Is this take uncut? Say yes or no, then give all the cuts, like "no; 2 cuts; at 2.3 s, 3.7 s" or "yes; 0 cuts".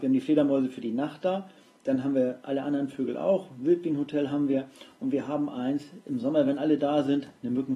yes; 0 cuts